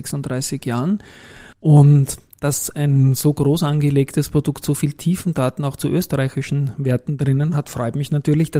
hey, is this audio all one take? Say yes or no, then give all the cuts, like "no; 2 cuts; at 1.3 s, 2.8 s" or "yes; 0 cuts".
no; 1 cut; at 1.5 s